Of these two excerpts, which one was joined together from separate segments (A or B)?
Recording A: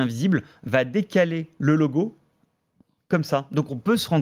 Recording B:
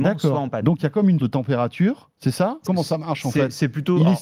B